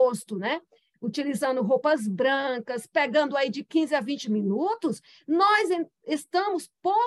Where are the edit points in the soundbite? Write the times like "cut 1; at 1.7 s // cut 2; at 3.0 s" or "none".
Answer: none